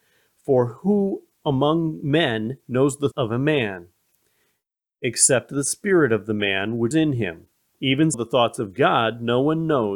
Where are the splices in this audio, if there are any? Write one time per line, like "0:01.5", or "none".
0:03.1
0:06.9
0:08.1